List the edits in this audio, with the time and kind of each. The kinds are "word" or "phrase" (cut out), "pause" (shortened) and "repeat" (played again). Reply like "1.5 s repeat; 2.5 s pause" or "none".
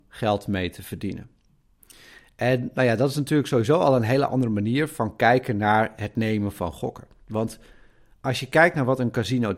none